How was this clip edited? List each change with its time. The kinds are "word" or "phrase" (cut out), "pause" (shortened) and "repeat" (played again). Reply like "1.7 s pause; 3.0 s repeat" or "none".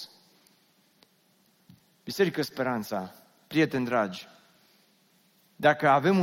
none